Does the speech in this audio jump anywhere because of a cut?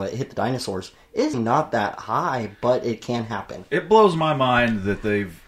yes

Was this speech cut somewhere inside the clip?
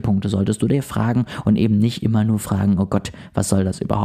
no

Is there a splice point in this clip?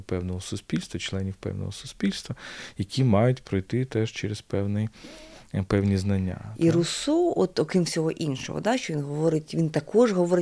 no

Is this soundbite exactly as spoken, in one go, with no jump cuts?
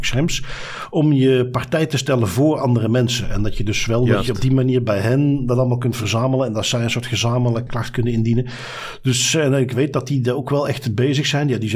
no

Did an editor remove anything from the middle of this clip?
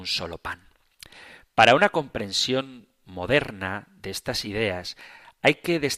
no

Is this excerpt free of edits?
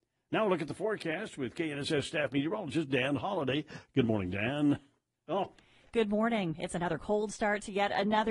yes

